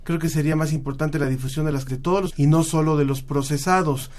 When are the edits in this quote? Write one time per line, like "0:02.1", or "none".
0:01.9
0:02.3